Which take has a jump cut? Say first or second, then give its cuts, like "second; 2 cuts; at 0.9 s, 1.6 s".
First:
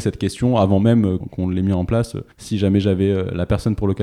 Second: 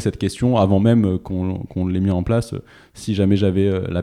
first; 2 cuts; at 1.2 s, 2.3 s